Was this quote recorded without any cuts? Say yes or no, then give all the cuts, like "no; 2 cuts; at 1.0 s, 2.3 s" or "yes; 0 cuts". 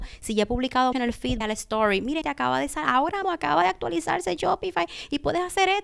no; 4 cuts; at 0.9 s, 1.4 s, 2.2 s, 3.2 s